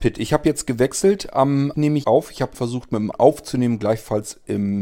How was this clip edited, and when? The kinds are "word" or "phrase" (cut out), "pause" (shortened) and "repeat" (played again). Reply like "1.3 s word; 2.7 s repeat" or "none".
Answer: 1.7 s word; 2.0 s word; 2.5 s word; 3.1 s word